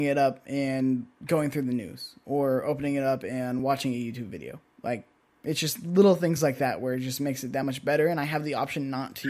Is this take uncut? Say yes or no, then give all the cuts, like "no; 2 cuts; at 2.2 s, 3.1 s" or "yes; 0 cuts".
yes; 0 cuts